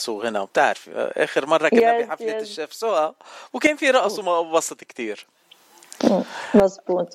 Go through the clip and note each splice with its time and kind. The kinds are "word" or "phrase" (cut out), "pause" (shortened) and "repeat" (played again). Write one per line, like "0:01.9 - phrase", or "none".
none